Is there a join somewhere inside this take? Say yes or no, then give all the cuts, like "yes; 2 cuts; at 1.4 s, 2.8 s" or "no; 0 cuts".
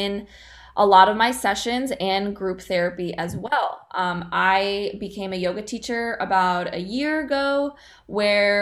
no; 0 cuts